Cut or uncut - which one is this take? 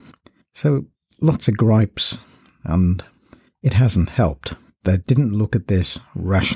uncut